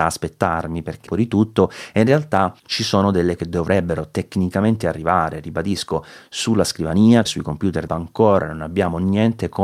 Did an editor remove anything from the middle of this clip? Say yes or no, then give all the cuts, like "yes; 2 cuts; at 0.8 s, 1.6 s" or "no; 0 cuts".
yes; 5 cuts; at 1.1 s, 2.6 s, 3.4 s, 7.2 s, 7.9 s